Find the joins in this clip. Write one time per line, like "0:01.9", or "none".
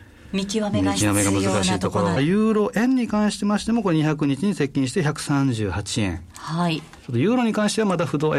0:02.2
0:07.0